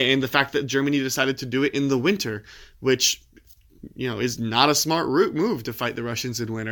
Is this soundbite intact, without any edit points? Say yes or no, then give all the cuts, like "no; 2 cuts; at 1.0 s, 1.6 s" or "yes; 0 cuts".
yes; 0 cuts